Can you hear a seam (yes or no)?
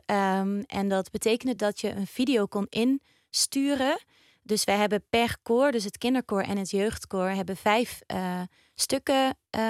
no